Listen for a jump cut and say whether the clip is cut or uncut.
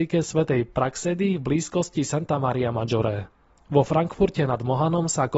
uncut